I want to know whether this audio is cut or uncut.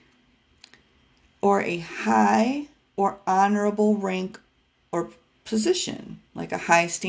uncut